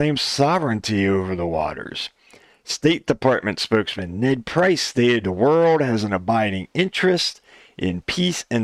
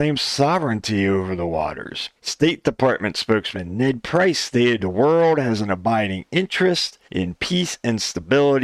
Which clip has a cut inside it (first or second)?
second